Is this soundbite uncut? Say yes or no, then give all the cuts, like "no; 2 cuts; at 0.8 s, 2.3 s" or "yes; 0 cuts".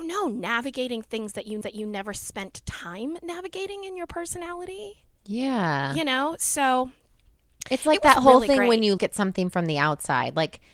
no; 3 cuts; at 1.6 s, 5.1 s, 9.0 s